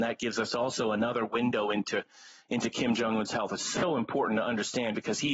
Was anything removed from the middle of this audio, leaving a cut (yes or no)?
no